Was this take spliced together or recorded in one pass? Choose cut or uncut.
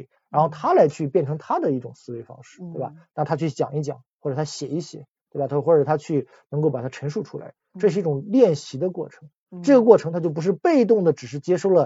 uncut